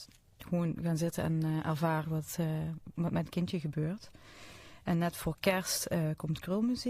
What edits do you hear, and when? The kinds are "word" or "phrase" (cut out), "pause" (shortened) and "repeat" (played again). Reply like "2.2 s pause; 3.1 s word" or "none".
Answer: 2.0 s phrase